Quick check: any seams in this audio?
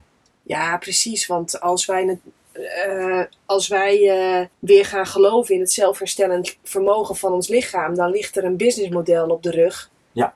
yes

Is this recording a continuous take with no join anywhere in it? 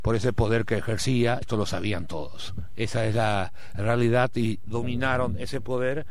no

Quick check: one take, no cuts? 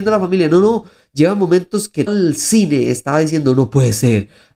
no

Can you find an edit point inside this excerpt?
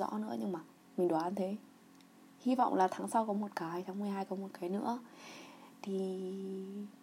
no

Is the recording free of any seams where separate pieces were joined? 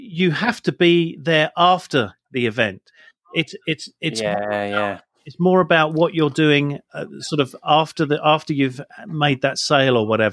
yes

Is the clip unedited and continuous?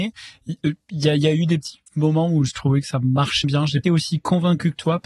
no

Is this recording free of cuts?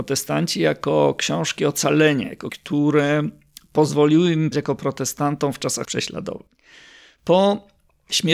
no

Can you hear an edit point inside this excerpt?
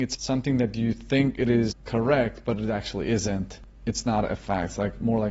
no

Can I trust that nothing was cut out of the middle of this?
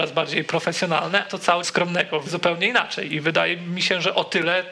no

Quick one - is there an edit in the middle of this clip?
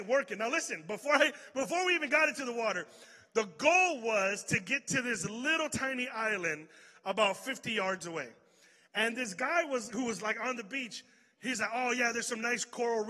no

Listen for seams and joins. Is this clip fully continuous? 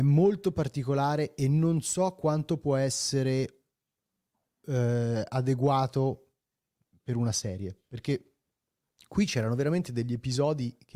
yes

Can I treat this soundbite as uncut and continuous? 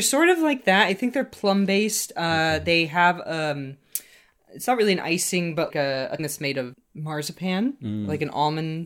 no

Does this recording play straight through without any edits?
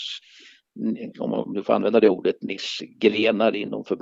yes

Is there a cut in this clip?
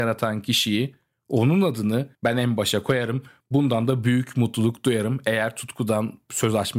yes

